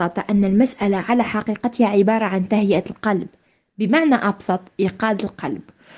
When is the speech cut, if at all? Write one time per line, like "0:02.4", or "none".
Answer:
none